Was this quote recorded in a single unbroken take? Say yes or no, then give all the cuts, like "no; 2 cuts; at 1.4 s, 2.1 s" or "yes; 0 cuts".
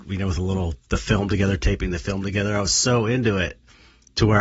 yes; 0 cuts